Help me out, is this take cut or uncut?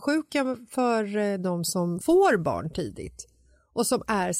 cut